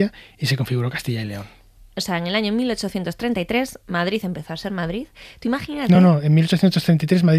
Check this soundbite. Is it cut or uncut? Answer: uncut